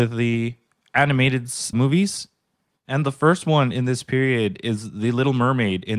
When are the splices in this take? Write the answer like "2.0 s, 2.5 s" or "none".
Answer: 1.7 s